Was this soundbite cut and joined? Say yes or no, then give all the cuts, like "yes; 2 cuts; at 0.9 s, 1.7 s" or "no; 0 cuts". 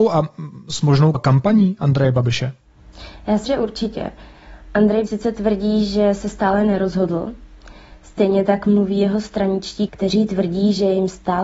yes; 4 cuts; at 1.1 s, 3.5 s, 5.1 s, 9.9 s